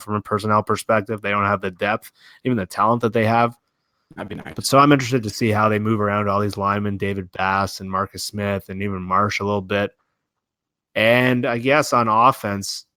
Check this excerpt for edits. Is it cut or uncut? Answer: uncut